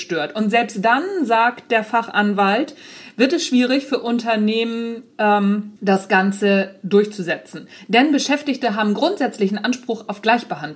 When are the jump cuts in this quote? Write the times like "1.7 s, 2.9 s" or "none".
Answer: 5.8 s